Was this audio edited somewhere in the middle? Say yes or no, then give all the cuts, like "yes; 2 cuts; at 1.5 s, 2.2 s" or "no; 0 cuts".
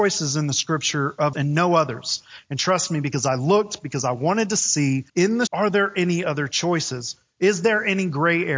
yes; 3 cuts; at 1.3 s, 5.1 s, 5.5 s